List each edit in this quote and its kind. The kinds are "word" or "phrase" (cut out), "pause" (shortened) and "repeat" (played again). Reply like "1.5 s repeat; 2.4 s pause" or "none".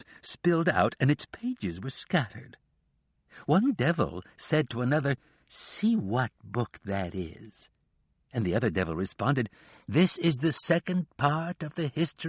none